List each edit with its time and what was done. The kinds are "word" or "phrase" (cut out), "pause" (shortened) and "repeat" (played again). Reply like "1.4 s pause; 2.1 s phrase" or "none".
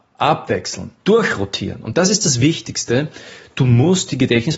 1.0 s pause